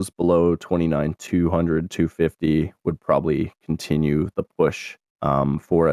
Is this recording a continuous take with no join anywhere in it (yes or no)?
yes